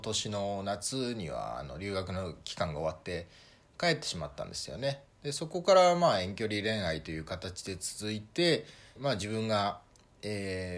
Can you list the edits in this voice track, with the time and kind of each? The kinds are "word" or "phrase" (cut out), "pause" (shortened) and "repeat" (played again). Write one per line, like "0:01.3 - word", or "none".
0:09.0 - word

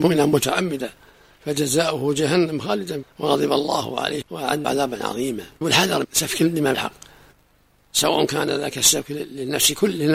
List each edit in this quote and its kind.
0:03.0 - word
0:04.2 - word
0:04.6 - word
0:05.6 - word
0:06.0 - word
0:06.7 - word

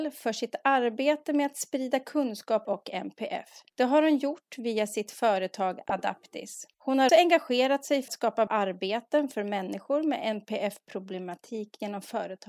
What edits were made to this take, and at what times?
0:02.6 - phrase
0:03.7 - pause
0:06.7 - pause
0:07.1 - word
0:08.1 - word
0:08.5 - word

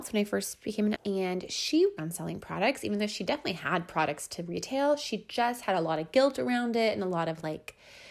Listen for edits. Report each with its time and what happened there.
0:00.9 - word
0:02.0 - phrase

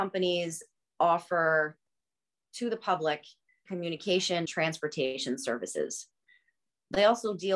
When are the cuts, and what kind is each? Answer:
0:03.7 - word
0:04.5 - word

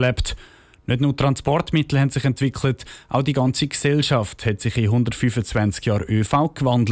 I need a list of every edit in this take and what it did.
none

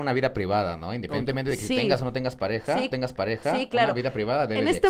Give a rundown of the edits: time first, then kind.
0:02.9 - repeat

